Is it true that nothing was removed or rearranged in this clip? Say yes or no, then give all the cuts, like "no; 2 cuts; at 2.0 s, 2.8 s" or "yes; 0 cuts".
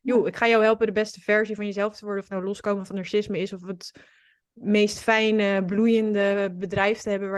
yes; 0 cuts